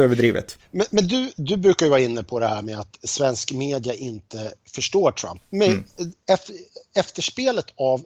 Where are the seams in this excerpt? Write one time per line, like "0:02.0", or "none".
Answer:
0:06.2